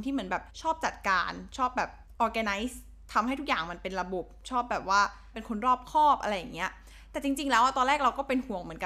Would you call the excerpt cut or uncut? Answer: uncut